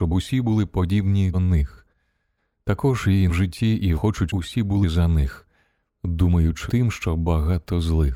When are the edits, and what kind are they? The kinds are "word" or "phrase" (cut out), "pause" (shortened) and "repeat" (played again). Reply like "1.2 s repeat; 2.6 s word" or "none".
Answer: 1.3 s word; 3.3 s word; 4.0 s word; 4.3 s word; 4.8 s word; 6.7 s word